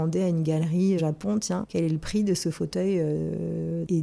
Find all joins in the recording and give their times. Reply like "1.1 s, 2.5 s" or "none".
1.0 s, 1.6 s